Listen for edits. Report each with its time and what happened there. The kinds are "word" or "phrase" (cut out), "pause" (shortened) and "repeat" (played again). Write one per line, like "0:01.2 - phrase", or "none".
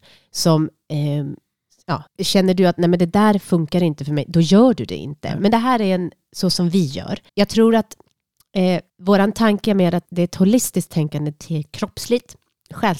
0:02.1 - phrase
0:07.3 - pause
0:08.9 - pause
0:10.1 - word